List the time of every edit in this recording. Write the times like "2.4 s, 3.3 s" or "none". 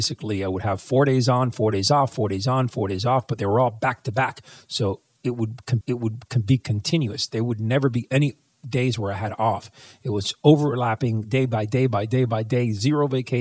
5.8 s